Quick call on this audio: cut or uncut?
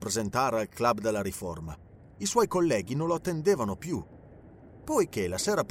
uncut